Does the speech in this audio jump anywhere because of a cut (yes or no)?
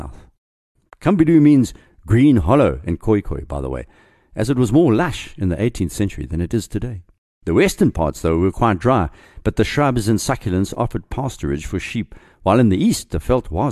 no